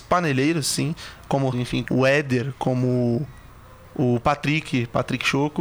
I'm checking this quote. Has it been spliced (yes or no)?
yes